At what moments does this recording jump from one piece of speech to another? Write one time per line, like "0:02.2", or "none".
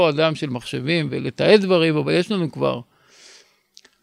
0:01.1